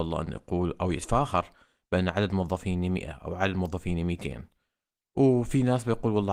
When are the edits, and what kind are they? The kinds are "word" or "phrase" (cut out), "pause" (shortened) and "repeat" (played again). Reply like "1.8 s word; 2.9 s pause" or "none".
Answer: none